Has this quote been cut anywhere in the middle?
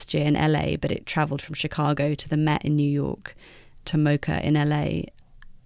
no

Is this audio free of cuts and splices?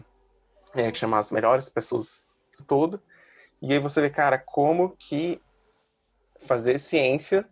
no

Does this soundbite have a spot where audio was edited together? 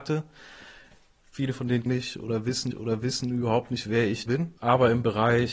yes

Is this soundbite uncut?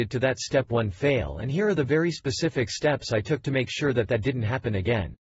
yes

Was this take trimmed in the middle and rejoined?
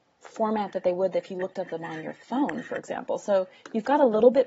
no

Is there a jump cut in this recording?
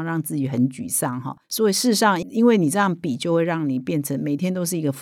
yes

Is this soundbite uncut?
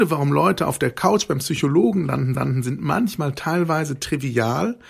no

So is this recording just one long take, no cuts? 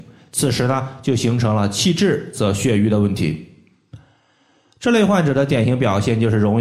yes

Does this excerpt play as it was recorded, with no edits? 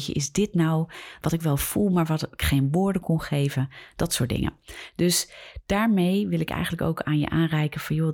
no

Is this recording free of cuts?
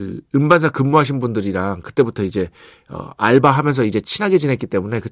yes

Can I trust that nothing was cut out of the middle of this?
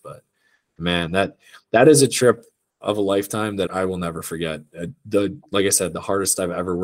no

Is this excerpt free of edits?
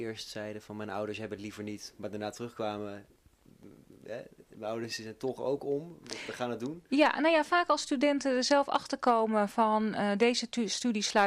yes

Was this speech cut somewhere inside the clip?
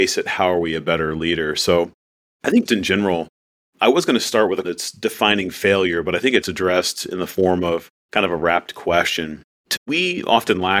yes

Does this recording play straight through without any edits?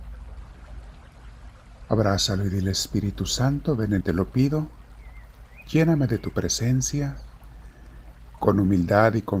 no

